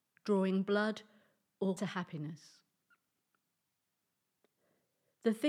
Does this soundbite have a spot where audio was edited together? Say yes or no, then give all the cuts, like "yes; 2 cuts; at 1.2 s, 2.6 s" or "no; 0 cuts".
yes; 1 cut; at 1.8 s